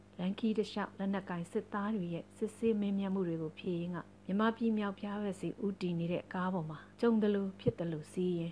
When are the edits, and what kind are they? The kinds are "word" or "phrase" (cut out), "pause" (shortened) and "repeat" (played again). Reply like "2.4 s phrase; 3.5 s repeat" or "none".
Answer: 4.1 s pause; 6.9 s pause